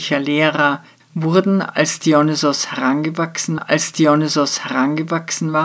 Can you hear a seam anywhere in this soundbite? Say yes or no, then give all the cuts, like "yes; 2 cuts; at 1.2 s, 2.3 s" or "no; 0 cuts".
yes; 2 cuts; at 1.0 s, 3.6 s